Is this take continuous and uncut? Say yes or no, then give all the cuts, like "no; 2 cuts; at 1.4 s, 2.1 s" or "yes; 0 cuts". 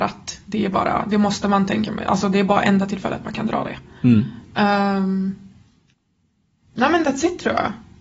yes; 0 cuts